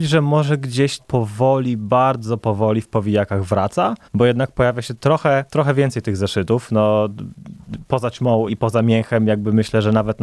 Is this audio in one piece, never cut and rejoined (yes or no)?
no